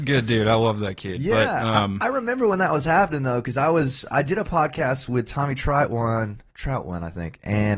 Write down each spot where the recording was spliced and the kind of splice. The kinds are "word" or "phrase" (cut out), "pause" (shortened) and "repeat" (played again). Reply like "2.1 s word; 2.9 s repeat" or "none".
6.5 s pause